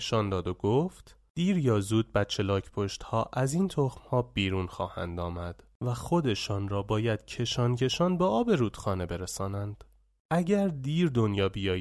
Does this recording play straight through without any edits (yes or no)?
yes